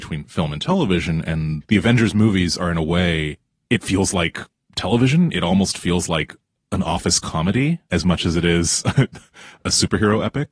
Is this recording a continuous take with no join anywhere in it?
yes; 0 cuts

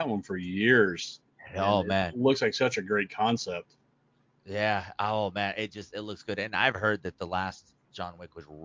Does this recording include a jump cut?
no; 0 cuts

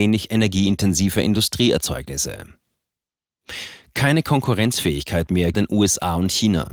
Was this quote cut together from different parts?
yes; 1 cut; at 5.5 s

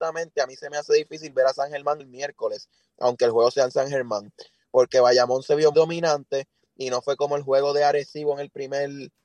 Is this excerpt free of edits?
no; 2 cuts; at 2.0 s, 5.7 s

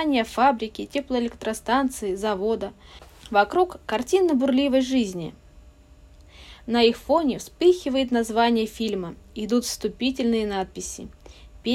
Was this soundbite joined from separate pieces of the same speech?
no; 0 cuts

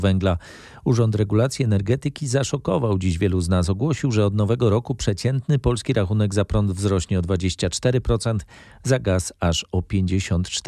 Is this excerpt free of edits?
yes; 0 cuts

